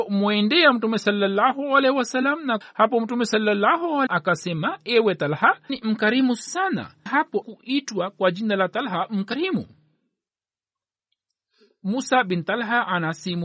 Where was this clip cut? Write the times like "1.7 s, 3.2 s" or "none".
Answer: 2.6 s, 4.1 s, 5.7 s, 7.1 s, 7.4 s